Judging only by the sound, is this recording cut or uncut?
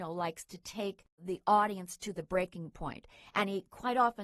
uncut